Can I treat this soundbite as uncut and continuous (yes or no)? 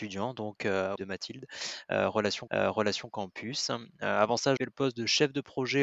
no